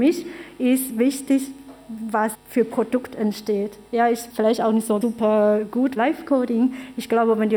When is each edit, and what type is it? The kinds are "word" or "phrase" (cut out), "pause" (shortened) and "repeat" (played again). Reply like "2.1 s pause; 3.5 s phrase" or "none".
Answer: 2.3 s phrase; 3.9 s pause; 4.3 s word; 5.0 s word; 6.0 s word

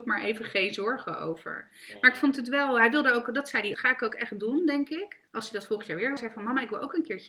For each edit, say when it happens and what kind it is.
3.7 s phrase; 5.3 s pause; 6.2 s word

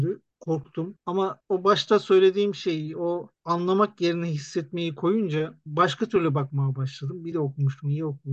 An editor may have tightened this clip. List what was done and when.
7.3 s phrase

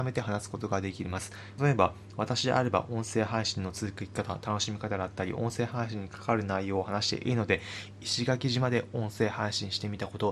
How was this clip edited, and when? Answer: 1.6 s phrase

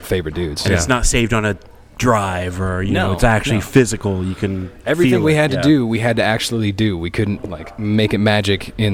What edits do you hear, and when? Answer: none

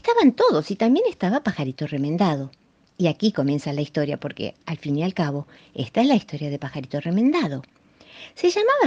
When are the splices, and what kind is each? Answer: none

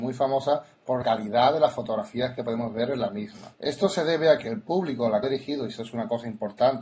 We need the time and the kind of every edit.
1.0 s word; 3.5 s pause; 5.2 s word

